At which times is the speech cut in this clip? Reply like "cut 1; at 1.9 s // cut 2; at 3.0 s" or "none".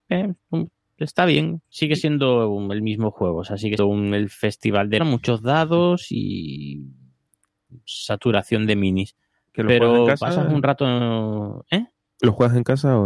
cut 1; at 1.7 s // cut 2; at 3.8 s // cut 3; at 5.0 s